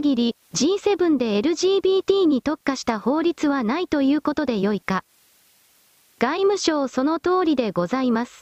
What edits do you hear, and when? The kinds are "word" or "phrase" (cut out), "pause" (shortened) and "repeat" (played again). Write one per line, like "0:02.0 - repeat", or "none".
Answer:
none